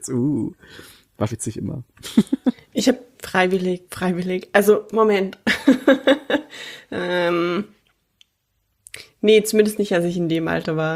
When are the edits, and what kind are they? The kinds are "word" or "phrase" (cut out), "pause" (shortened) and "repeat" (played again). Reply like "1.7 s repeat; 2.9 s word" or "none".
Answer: 1.3 s word; 3.1 s word; 3.8 s word